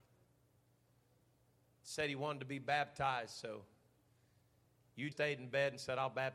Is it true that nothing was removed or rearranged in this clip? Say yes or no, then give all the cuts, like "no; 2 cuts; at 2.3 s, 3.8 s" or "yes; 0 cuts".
no; 1 cut; at 5.1 s